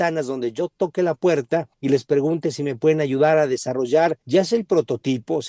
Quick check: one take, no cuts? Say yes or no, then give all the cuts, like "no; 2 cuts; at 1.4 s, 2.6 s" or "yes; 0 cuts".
no; 2 cuts; at 1.7 s, 4.2 s